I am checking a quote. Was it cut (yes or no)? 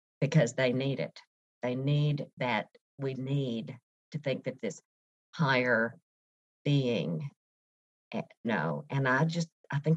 yes